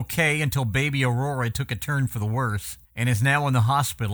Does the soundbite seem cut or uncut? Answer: cut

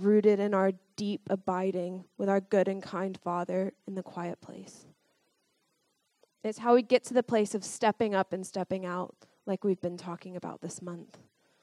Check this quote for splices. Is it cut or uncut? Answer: uncut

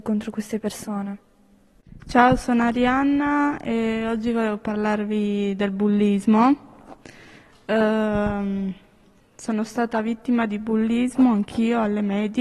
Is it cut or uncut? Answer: uncut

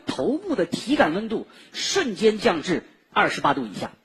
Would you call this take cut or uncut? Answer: uncut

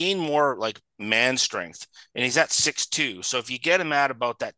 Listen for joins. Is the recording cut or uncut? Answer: uncut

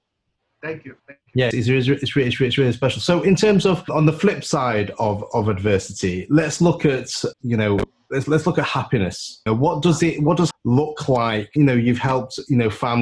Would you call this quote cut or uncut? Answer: cut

